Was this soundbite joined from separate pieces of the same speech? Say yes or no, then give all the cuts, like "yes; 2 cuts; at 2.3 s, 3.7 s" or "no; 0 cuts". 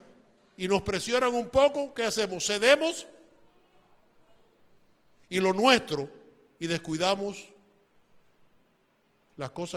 no; 0 cuts